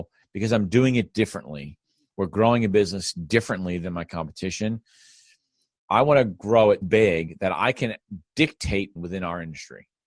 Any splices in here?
yes; 2 cuts; at 6.8 s, 9.0 s

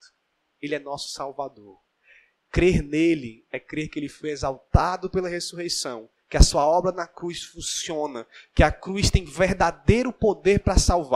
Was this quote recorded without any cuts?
yes; 0 cuts

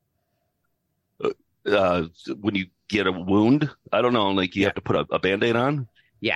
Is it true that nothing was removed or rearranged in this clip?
yes; 0 cuts

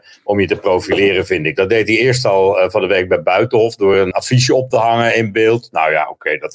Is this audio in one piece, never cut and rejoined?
yes; 0 cuts

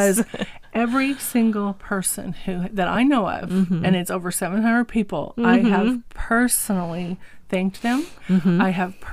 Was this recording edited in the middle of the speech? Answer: no; 0 cuts

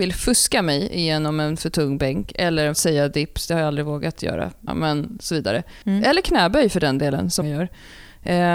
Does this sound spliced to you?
yes; 4 cuts; at 2.7 s, 4.7 s, 5.8 s, 7.4 s

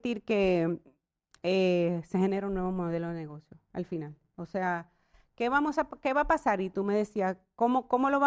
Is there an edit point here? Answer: no; 0 cuts

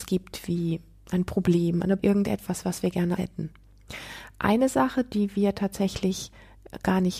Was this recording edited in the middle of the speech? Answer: yes; 2 cuts; at 2.0 s, 3.2 s

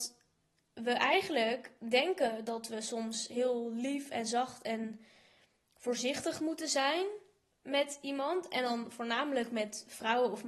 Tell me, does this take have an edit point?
no; 0 cuts

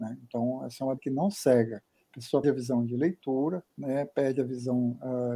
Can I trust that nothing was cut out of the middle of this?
no; 3 cuts; at 1.0 s, 2.4 s, 3.7 s

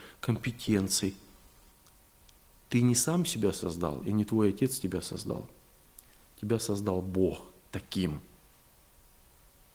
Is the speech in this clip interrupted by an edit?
no; 0 cuts

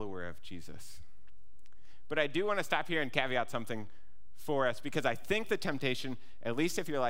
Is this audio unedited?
yes; 0 cuts

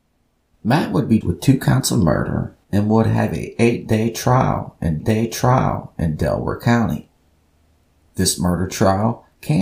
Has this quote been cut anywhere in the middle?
yes; 3 cuts; at 1.2 s, 2.6 s, 5.0 s

